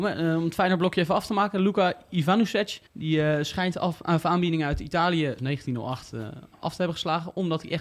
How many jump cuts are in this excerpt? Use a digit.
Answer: 2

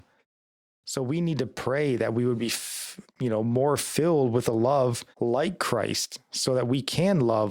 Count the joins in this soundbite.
1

